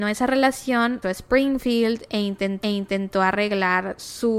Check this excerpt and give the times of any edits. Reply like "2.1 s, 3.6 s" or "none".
1.0 s, 2.6 s